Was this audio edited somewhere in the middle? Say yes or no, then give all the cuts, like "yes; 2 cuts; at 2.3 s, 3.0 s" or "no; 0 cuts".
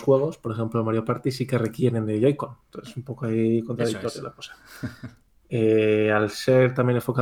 no; 0 cuts